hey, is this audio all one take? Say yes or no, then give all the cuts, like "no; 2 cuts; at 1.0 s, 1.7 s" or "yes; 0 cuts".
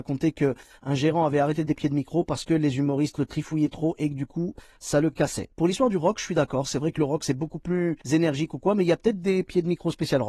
no; 2 cuts; at 1.7 s, 8.0 s